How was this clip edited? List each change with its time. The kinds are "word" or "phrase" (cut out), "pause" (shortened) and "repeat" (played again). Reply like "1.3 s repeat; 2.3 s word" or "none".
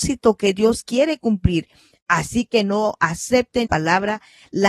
3.6 s word

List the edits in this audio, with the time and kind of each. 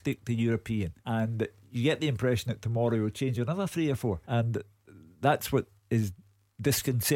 1.0 s pause; 4.2 s pause; 5.8 s pause

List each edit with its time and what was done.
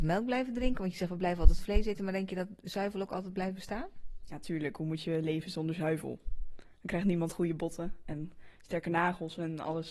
none

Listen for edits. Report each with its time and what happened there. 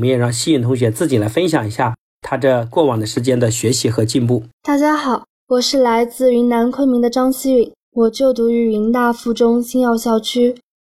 4.5 s pause; 5.3 s pause; 7.8 s pause

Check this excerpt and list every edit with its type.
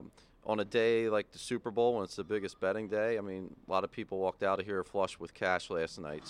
none

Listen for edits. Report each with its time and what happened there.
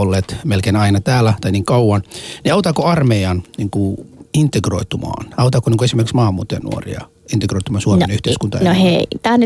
none

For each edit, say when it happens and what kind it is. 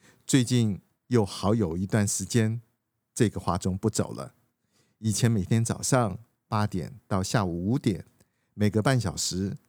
none

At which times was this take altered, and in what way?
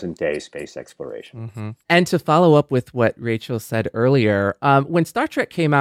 1.8 s pause

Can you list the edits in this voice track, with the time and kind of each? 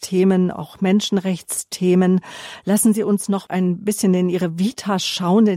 3.5 s word

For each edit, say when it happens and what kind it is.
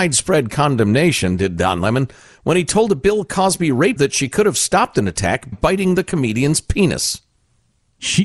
4.0 s word; 5.5 s word

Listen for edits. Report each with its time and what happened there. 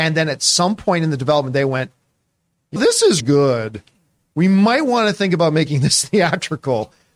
2.8 s word; 3.2 s word

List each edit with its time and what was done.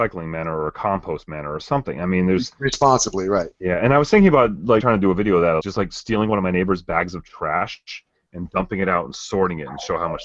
3.5 s pause; 4.8 s word; 5.6 s word

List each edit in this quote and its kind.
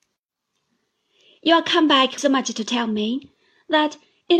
2.2 s word

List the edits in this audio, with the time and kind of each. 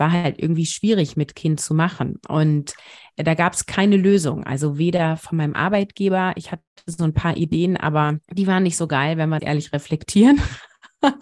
8.2 s pause; 9.4 s phrase

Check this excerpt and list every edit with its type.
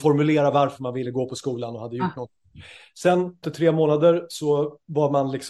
3.4 s word

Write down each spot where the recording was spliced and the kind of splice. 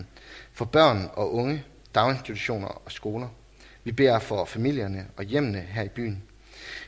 none

